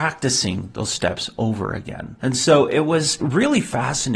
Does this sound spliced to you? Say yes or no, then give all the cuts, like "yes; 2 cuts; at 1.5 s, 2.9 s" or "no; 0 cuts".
no; 0 cuts